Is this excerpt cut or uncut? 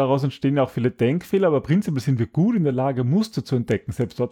uncut